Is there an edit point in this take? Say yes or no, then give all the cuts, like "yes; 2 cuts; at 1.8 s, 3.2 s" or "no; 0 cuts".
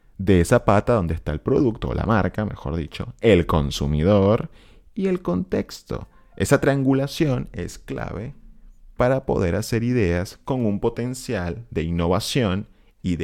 no; 0 cuts